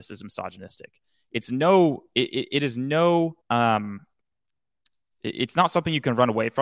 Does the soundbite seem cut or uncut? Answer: cut